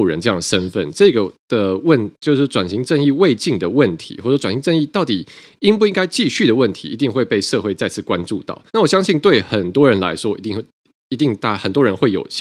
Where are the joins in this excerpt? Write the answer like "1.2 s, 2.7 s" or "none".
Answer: 1.4 s, 8.7 s